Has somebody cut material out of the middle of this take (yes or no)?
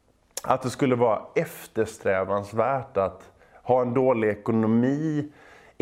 no